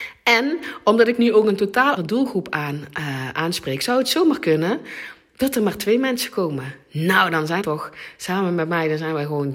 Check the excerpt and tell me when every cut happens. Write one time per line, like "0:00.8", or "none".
0:02.0
0:07.6

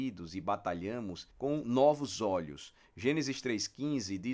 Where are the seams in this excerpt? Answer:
0:01.3

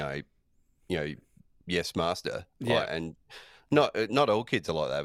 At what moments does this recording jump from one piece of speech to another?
none

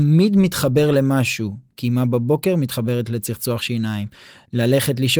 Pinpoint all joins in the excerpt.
none

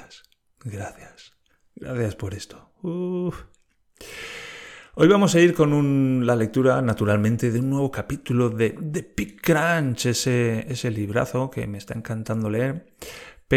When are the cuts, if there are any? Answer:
none

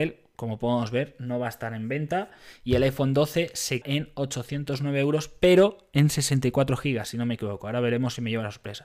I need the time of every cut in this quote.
0:03.8

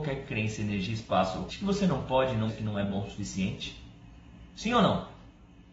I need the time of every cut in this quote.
0:01.5
0:02.5

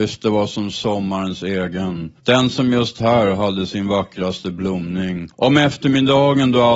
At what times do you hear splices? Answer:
0:02.2
0:05.3

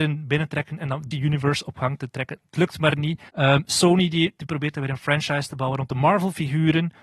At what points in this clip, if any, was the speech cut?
0:01.1
0:03.3

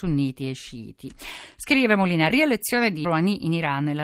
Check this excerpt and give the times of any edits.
0:02.3
0:03.0

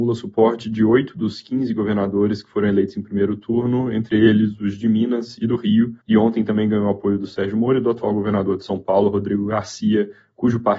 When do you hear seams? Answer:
0:06.0

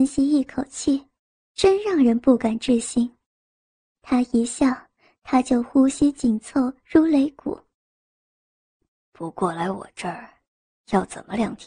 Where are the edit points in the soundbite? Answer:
none

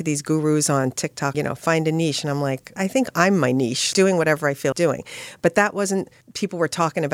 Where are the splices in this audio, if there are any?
0:01.3
0:02.8
0:03.9
0:04.7
0:06.2

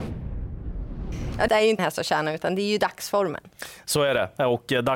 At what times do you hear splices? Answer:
0:01.5
0:01.8

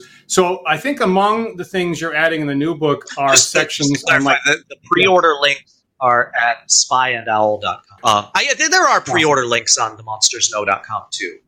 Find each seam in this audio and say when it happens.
0:08.0

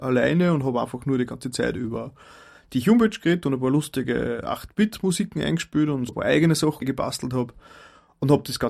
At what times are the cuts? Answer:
0:06.1
0:06.8

